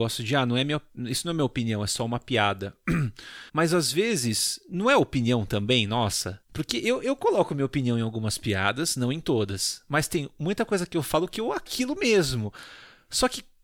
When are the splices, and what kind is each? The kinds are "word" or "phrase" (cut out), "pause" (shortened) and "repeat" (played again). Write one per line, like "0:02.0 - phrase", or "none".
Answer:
0:03.5 - pause
0:06.4 - pause
0:11.7 - phrase